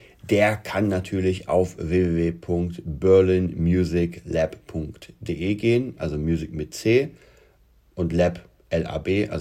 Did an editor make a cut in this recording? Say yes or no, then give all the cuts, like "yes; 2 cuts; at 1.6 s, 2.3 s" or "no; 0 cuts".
no; 0 cuts